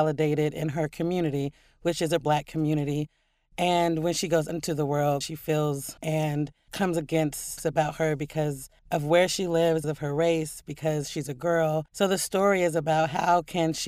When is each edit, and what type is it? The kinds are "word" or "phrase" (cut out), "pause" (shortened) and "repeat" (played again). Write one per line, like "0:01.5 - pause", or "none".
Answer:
0:02.2 - word
0:04.5 - word
0:05.2 - phrase
0:06.0 - word
0:06.7 - word
0:07.6 - word
0:08.8 - pause
0:09.8 - word
0:11.9 - pause